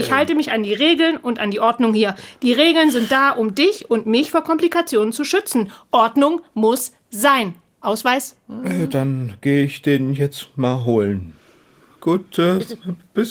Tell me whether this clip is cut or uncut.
uncut